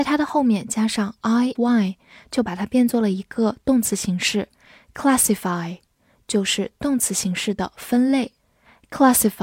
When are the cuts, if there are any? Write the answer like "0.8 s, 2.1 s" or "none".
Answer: 1.5 s